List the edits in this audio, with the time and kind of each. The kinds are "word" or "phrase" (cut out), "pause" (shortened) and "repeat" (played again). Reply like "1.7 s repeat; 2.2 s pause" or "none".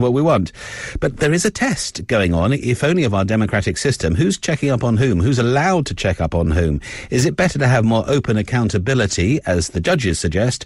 none

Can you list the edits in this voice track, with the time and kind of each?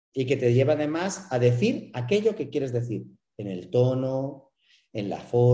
none

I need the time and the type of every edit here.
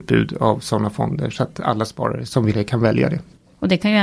2.5 s word

